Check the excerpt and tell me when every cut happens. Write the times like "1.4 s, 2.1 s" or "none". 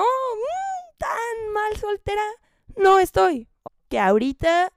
3.7 s

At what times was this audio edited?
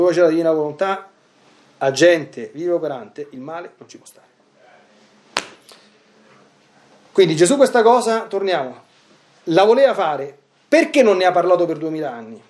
none

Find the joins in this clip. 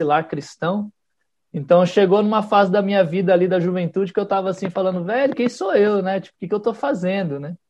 none

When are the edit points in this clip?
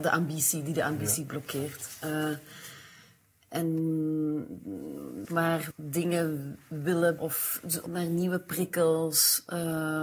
5.2 s, 5.7 s, 7.2 s, 7.9 s

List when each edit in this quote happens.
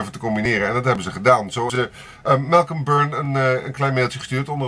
1.7 s

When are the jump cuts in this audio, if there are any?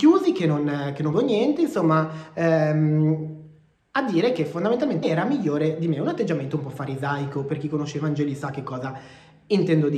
1.1 s, 3.8 s, 5.0 s

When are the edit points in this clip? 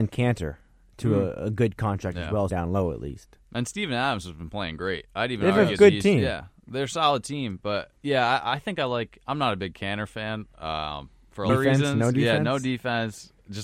2.5 s, 7.9 s, 11.5 s

